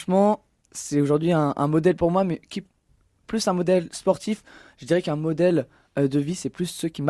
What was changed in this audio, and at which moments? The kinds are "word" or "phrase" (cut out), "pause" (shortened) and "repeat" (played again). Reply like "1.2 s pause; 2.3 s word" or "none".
none

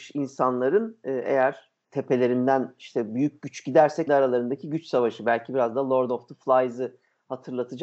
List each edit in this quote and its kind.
4.1 s word

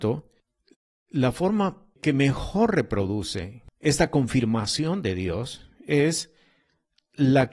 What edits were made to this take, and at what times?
1.9 s pause; 3.7 s pause

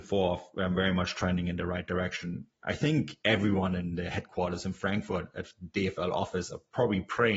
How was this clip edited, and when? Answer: none

